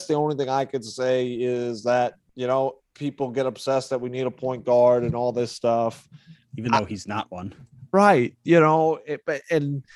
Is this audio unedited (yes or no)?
yes